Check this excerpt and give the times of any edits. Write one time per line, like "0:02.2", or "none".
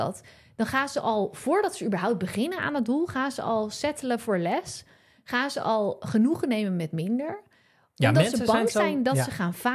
none